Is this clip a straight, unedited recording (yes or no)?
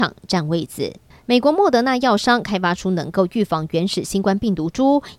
yes